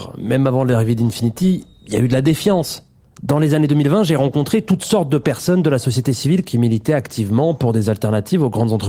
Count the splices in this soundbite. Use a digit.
0